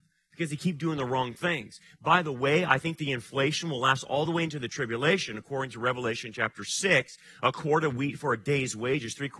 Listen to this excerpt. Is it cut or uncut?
uncut